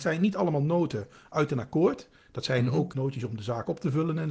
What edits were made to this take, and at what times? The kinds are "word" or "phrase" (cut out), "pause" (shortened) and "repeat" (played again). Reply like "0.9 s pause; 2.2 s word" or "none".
2.9 s word

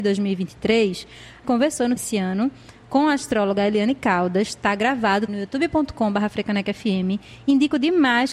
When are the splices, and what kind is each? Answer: 1.4 s word; 2.0 s word; 5.3 s word

